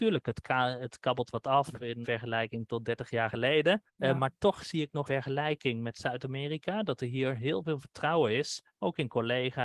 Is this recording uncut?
no; 4 cuts; at 2.0 s, 3.9 s, 5.1 s, 8.7 s

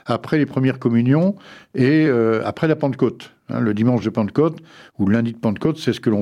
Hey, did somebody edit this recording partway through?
no; 0 cuts

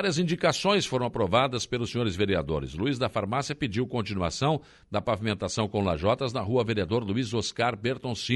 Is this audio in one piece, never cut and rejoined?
yes; 0 cuts

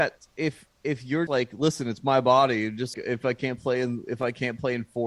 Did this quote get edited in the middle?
yes; 2 cuts; at 1.3 s, 2.9 s

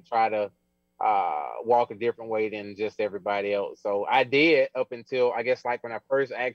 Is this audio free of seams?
yes; 0 cuts

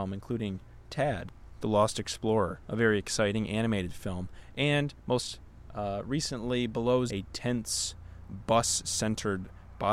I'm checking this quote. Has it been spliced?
yes; 1 cut; at 7.1 s

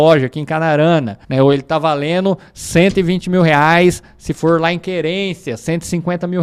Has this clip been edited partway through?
yes; 1 cut; at 1.2 s

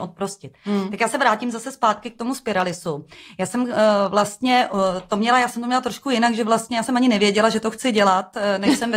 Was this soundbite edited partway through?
no; 0 cuts

